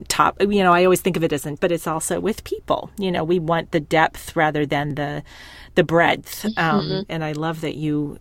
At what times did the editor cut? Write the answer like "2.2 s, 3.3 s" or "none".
1.6 s